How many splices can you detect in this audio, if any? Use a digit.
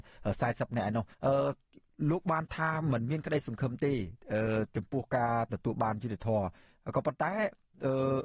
1